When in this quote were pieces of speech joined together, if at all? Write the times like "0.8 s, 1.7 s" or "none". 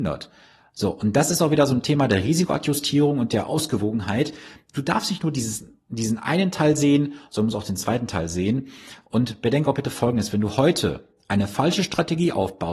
none